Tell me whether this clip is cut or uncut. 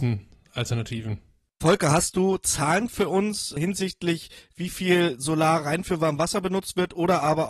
uncut